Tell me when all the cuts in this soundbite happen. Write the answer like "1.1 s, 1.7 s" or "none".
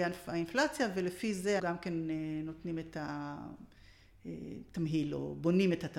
1.6 s